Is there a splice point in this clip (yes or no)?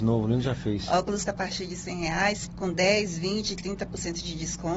yes